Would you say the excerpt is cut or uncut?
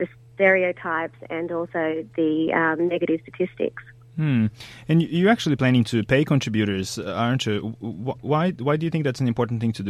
uncut